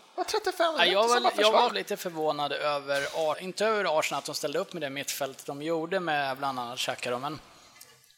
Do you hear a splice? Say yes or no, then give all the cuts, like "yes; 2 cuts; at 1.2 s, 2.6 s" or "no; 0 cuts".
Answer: yes; 2 cuts; at 1.7 s, 3.3 s